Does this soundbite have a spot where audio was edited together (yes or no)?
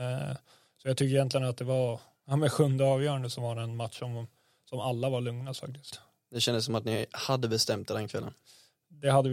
no